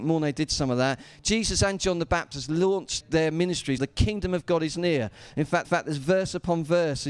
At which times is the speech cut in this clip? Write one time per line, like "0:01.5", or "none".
0:03.0
0:03.8
0:05.6